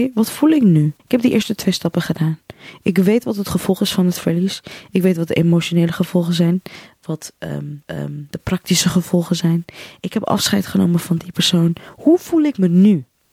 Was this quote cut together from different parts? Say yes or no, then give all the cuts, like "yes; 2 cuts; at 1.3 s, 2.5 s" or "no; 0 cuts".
yes; 2 cuts; at 1.0 s, 7.8 s